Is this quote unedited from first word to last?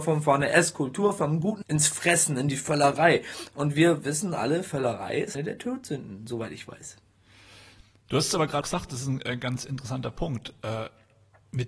no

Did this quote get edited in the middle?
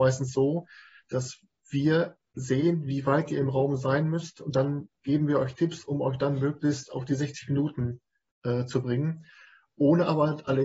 no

